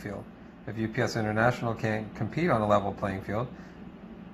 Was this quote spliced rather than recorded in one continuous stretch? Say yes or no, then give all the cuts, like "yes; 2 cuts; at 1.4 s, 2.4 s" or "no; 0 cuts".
no; 0 cuts